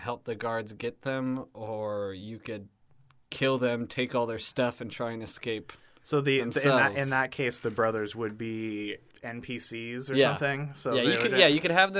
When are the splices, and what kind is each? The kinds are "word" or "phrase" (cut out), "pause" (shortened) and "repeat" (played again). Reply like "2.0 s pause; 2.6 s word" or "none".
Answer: none

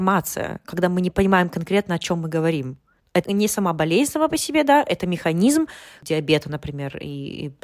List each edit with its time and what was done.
3.2 s word; 6.0 s word

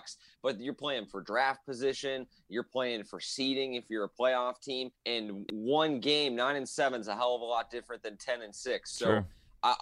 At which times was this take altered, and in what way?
4.9 s pause

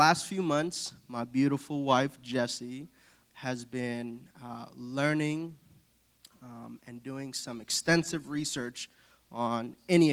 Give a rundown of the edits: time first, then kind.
3.2 s word

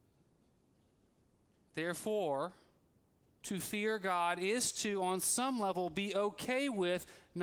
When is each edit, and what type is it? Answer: none

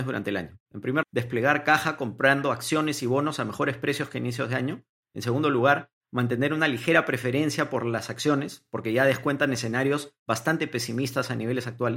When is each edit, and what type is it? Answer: 1.0 s word

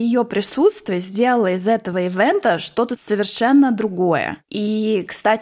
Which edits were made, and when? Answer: none

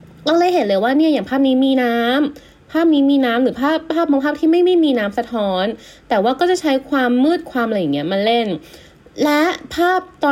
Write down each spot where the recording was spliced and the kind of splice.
none

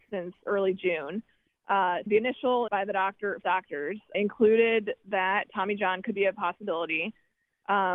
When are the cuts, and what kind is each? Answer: 2.1 s word; 2.7 s word; 3.4 s word; 4.1 s word

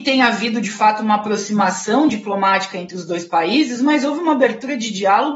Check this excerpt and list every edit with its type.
none

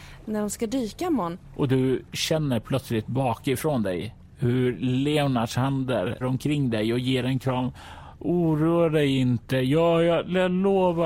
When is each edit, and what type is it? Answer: 6.2 s word

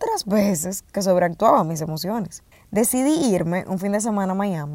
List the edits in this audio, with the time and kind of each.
2.5 s pause

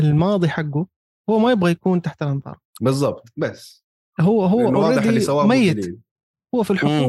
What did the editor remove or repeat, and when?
2.7 s pause

